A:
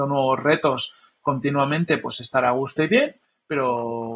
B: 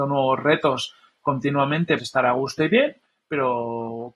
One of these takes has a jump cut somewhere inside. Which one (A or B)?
B